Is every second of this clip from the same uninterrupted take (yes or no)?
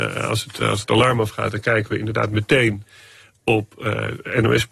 yes